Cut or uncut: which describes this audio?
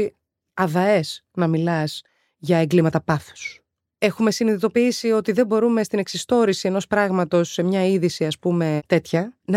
uncut